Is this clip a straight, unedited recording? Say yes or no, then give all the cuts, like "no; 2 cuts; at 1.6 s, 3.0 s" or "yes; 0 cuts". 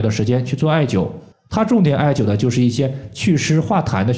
no; 1 cut; at 1.3 s